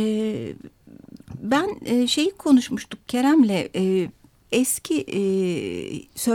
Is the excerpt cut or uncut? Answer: uncut